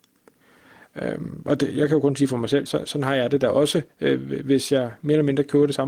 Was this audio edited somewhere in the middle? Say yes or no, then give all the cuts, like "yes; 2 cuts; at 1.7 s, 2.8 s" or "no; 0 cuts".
yes; 1 cut; at 2.7 s